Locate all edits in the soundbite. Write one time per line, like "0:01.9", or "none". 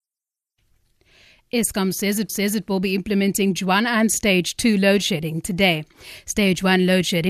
0:02.3
0:03.6